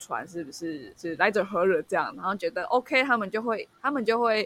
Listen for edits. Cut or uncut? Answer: uncut